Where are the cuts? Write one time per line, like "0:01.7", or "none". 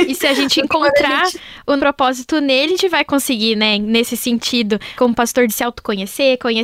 0:01.8
0:02.7
0:05.0
0:05.5